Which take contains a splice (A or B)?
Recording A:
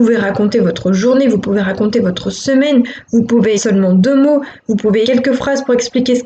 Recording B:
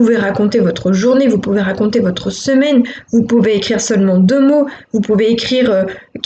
A